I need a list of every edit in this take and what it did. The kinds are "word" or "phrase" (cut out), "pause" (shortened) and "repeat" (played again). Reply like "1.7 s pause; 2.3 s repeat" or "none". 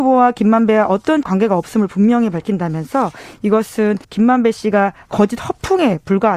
1.2 s word; 4.0 s pause; 5.0 s word

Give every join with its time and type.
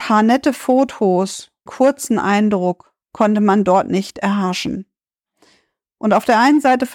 1.7 s phrase; 3.0 s pause

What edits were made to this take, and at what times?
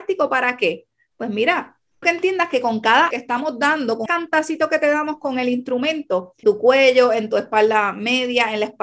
2.0 s word; 3.1 s word; 4.1 s word; 6.4 s word

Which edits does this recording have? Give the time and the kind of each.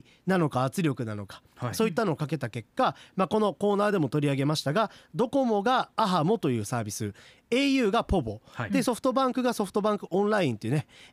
none

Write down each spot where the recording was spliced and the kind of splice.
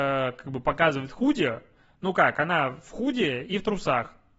none

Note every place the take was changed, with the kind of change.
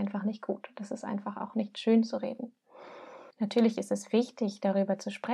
3.3 s pause

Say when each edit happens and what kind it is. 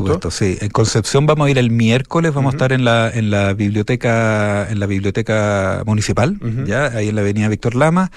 none

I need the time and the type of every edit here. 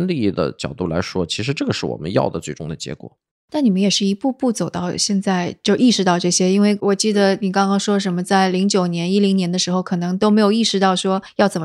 none

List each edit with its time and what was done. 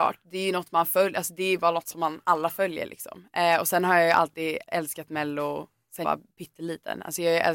4.7 s word; 6.0 s word

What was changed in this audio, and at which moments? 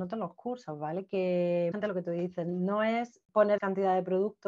1.7 s word; 3.6 s word

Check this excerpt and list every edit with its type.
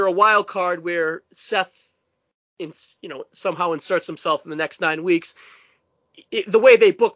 none

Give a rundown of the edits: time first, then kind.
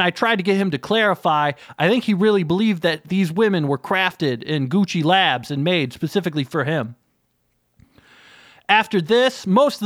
none

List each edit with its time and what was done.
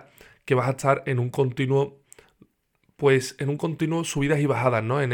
none

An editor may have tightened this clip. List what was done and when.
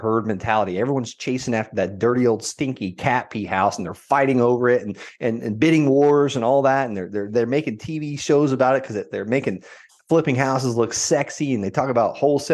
none

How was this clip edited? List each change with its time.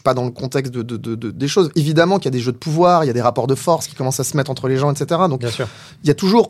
none

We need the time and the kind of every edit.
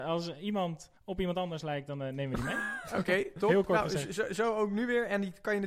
1.0 s pause

